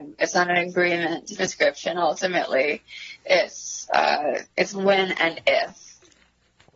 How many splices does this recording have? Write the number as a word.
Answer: two